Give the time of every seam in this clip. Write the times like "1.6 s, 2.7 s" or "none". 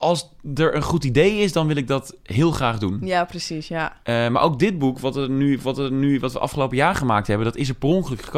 5.6 s